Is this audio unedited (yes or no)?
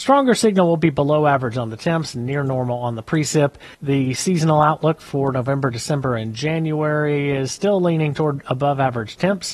no